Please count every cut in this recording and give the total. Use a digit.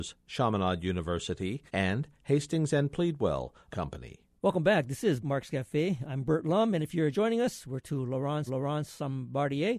7